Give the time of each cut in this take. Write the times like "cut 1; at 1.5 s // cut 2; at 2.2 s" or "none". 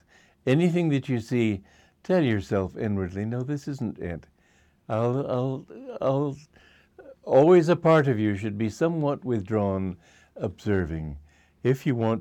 none